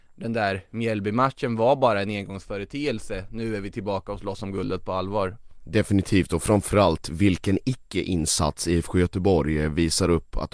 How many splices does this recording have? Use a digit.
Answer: 0